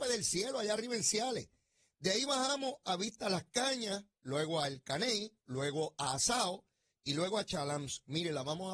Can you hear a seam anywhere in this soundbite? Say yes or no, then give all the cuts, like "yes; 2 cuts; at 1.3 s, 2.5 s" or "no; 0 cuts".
no; 0 cuts